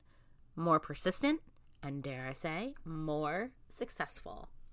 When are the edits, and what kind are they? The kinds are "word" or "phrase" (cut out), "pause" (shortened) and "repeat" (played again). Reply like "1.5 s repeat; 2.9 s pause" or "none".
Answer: none

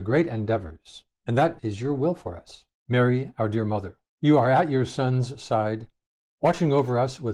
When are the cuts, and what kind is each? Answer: 1.1 s pause; 1.6 s word; 2.8 s pause; 4.1 s pause

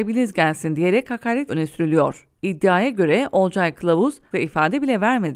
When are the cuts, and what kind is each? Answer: 1.5 s word; 2.4 s pause; 4.3 s word

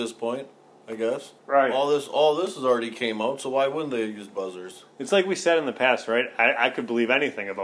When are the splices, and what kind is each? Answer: 1.4 s pause

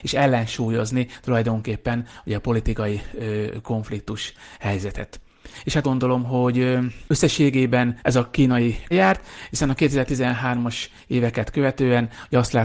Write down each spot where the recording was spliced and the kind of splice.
5.8 s phrase; 8.0 s pause; 8.9 s phrase

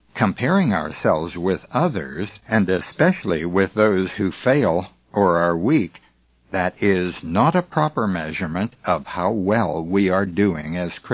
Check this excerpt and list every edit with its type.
none

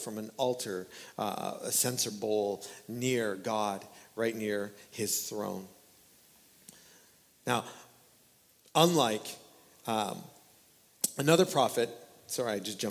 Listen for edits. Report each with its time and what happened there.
none

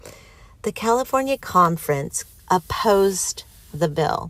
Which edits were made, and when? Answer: 1.4 s word

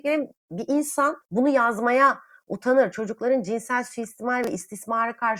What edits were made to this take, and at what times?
none

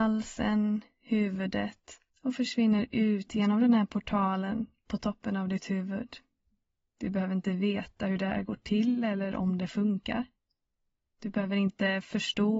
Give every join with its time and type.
2.1 s pause; 6.6 s pause

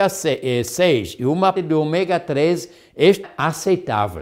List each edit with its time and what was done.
1.6 s word; 3.2 s word

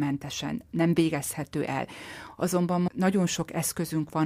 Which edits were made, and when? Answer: 2.9 s word

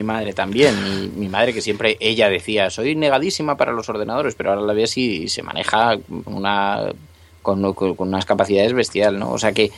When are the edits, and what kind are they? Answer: 1.1 s word; 6.3 s word

